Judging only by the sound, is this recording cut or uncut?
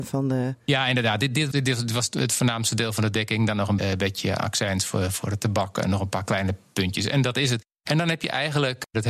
cut